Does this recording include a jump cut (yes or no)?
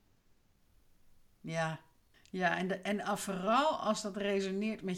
yes